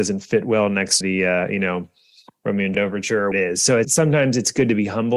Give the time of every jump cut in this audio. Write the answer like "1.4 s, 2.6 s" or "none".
1.0 s, 2.7 s, 3.3 s, 3.8 s